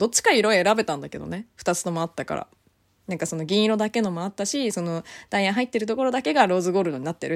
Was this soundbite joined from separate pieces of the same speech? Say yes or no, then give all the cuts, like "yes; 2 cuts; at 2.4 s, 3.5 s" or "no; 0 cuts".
no; 0 cuts